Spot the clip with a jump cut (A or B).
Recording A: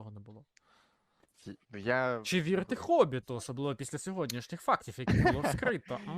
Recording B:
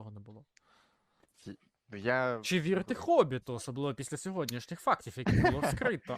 A